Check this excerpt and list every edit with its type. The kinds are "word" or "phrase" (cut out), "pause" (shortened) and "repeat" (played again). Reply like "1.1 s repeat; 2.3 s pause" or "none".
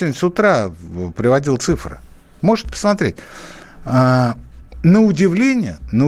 none